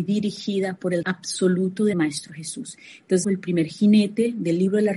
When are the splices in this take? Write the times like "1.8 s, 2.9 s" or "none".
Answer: 1.0 s, 1.9 s, 3.2 s